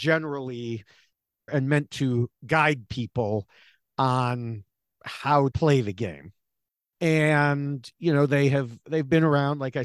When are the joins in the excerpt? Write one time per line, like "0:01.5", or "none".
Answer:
0:01.5
0:05.5